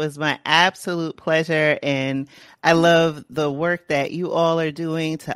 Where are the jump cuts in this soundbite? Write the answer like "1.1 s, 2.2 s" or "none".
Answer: none